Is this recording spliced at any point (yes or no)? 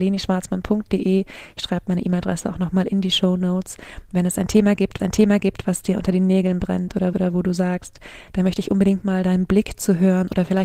yes